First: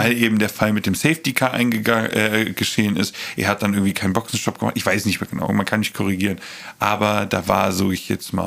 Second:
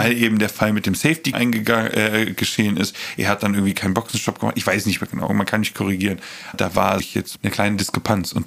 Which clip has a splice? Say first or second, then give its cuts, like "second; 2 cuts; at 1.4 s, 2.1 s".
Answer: second; 4 cuts; at 1.3 s, 6.5 s, 7.0 s, 7.4 s